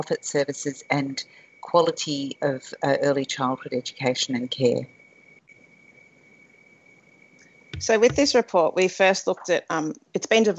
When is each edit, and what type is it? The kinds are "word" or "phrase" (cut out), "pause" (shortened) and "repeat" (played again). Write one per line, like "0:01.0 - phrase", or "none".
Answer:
none